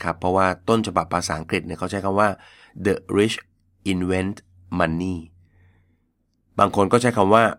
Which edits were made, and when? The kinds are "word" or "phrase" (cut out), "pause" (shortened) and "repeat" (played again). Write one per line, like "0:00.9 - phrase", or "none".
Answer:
none